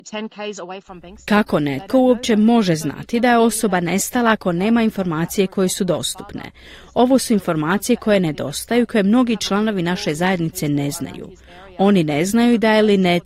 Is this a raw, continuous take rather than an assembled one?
yes; 0 cuts

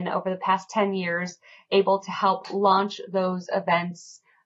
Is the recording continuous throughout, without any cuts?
yes; 0 cuts

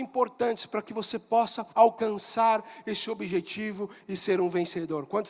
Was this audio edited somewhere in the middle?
yes; 1 cut; at 1.7 s

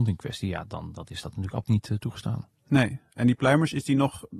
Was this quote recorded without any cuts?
no; 1 cut; at 1.6 s

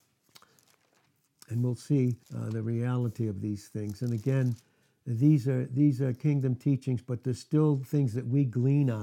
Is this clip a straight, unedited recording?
no; 1 cut; at 2.2 s

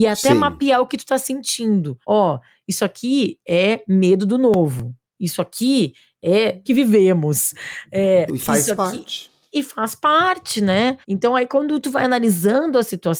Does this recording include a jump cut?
yes; 4 cuts; at 2.0 s, 6.6 s, 8.3 s, 11.0 s

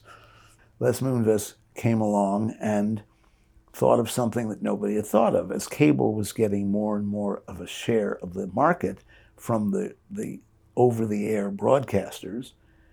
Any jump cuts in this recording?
no; 0 cuts

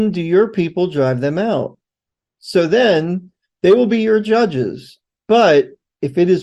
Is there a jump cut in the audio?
no; 0 cuts

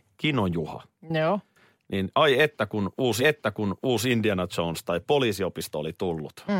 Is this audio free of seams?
no; 1 cut; at 3.2 s

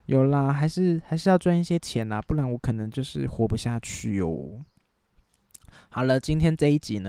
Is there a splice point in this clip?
no; 0 cuts

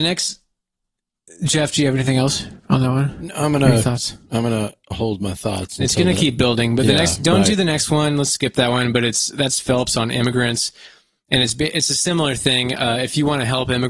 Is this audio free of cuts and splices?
no; 1 cut; at 2.6 s

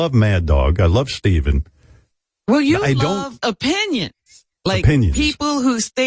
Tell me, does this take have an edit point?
no; 0 cuts

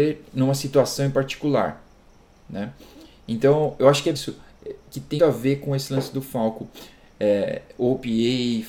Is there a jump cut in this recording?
yes; 2 cuts; at 4.1 s, 5.2 s

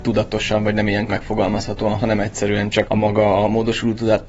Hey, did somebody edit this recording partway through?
yes; 3 cuts; at 1.1 s, 2.0 s, 2.9 s

